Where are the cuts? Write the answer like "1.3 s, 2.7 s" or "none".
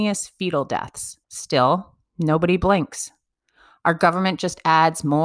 1.2 s